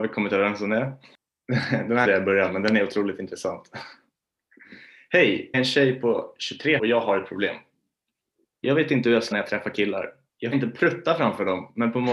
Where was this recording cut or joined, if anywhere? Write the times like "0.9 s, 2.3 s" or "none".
2.0 s, 5.5 s, 6.8 s, 9.3 s, 10.5 s